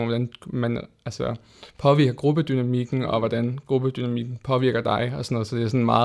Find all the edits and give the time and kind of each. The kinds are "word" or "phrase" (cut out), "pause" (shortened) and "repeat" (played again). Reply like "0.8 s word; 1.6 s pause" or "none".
none